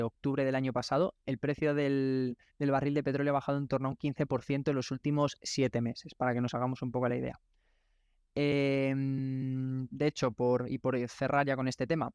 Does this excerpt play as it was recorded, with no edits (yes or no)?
yes